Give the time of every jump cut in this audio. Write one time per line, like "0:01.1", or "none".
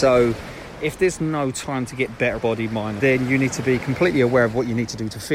0:02.4
0:03.0